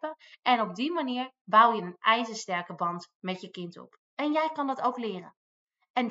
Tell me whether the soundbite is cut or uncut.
cut